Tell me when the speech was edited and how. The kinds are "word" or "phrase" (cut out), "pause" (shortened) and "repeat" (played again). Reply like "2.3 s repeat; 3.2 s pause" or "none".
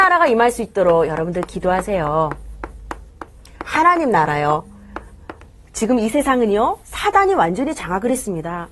none